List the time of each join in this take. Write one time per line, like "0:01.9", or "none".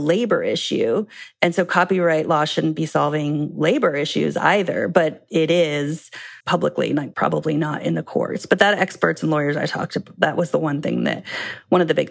0:06.4
0:07.1
0:08.8